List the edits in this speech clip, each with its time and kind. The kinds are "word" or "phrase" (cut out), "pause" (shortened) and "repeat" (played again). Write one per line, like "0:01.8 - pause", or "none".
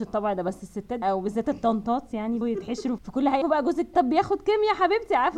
0:01.0 - word
0:02.4 - word
0:03.0 - word
0:03.4 - word
0:03.9 - word